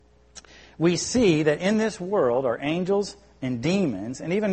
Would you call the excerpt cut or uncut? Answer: uncut